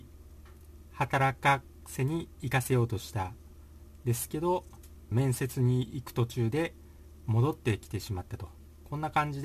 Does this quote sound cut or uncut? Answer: cut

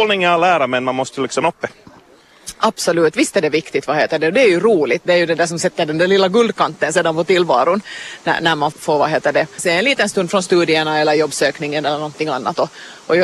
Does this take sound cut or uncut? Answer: cut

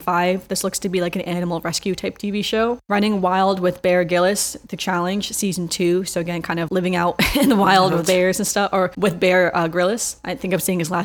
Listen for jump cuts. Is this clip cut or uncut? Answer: cut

